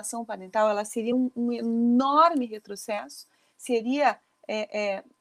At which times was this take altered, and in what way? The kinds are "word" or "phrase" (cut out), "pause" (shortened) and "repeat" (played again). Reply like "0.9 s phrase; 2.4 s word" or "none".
none